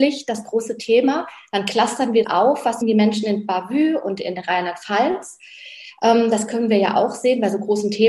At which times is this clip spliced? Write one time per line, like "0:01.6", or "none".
0:02.2
0:02.8